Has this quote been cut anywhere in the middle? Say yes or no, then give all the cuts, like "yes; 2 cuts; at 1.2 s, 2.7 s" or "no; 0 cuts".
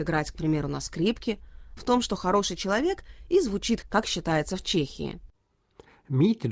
yes; 2 cuts; at 1.8 s, 3.8 s